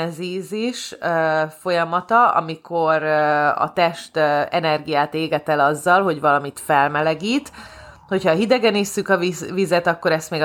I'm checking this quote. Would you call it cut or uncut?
uncut